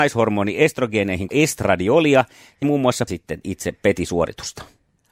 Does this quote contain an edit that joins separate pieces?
yes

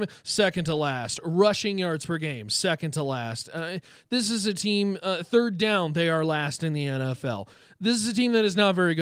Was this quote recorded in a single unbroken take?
yes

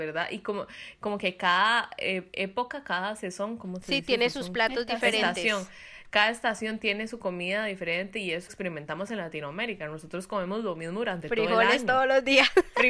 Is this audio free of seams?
no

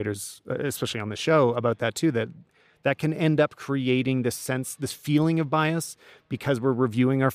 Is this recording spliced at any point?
no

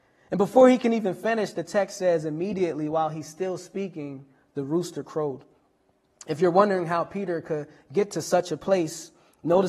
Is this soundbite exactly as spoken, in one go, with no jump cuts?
yes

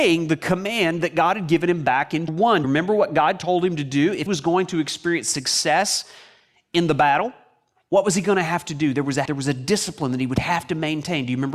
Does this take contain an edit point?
yes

